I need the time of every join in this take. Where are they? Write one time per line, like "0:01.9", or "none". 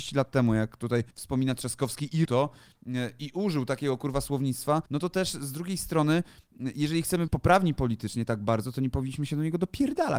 0:01.1
0:02.2
0:04.9
0:07.3